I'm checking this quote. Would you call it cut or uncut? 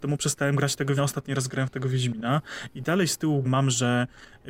cut